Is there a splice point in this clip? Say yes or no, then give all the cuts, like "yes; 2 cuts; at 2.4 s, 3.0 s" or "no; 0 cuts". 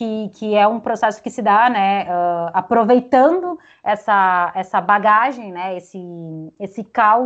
no; 0 cuts